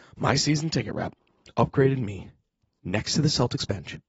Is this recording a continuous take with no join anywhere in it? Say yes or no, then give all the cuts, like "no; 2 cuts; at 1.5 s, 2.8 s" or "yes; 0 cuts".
yes; 0 cuts